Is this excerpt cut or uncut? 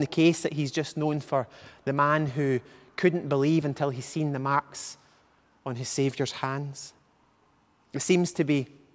uncut